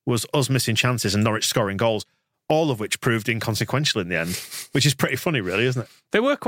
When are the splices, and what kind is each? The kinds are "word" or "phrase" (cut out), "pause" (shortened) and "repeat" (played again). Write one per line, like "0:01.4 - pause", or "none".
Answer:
none